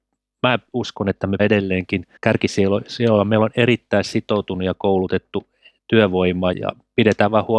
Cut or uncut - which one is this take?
cut